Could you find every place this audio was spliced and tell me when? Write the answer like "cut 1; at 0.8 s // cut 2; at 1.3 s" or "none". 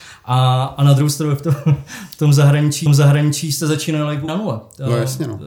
cut 1; at 2.9 s // cut 2; at 4.3 s